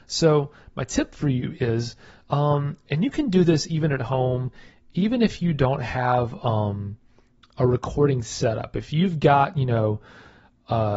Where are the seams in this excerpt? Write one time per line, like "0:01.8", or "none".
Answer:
none

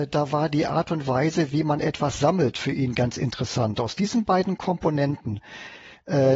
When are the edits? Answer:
none

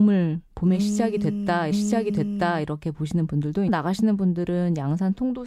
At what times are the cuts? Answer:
0:01.7
0:03.7

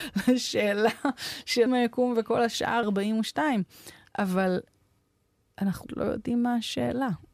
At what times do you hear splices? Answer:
0:01.7
0:02.8
0:05.9

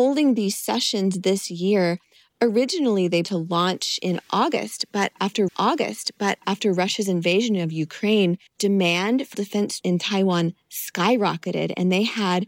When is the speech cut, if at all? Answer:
0:03.2
0:05.5
0:08.5
0:09.3
0:09.8

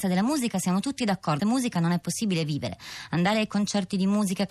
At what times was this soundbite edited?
0:01.4

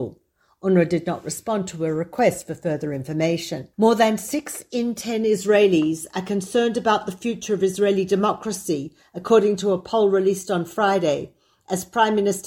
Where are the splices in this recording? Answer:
0:03.7

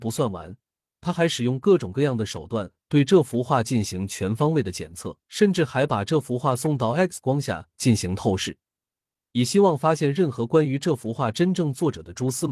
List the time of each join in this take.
0:05.2

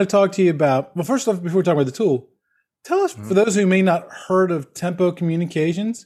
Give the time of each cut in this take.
none

